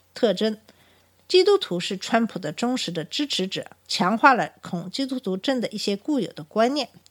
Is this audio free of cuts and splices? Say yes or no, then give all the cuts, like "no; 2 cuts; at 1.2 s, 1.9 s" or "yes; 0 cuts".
no; 1 cut; at 3.8 s